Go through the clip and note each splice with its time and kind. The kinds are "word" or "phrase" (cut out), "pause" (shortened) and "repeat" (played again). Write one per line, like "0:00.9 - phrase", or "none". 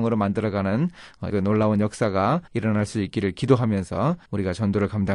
0:01.3 - word
0:02.5 - pause
0:04.2 - pause